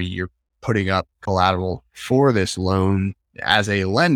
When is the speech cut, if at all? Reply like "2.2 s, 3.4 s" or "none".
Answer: 1.1 s